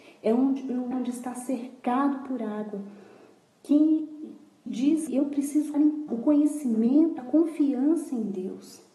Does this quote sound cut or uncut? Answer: cut